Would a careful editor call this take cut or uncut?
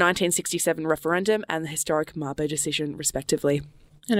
uncut